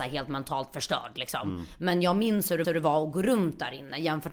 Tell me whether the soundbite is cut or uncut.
cut